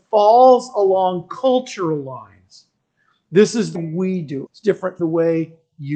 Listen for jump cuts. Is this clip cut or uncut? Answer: cut